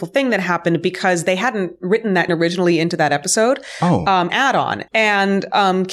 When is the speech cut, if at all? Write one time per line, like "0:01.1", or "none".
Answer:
0:02.3
0:04.3
0:04.9

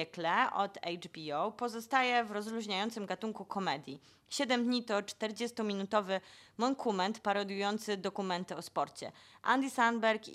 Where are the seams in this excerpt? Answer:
none

